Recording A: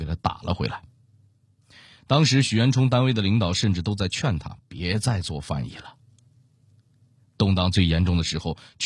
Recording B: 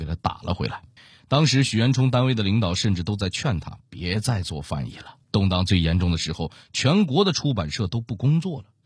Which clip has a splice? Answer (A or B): B